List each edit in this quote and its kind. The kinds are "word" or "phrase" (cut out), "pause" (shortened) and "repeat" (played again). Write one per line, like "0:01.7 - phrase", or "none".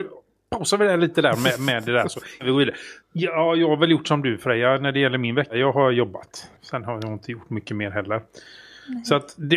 0:03.0 - pause
0:06.6 - pause